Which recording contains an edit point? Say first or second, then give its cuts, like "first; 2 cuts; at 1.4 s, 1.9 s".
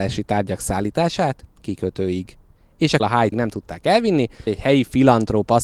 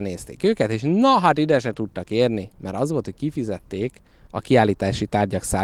first; 4 cuts; at 1.6 s, 3.0 s, 3.3 s, 4.5 s